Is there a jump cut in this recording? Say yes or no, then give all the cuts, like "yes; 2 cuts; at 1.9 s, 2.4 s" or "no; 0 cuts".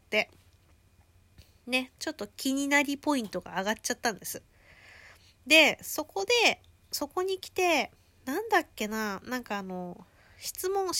no; 0 cuts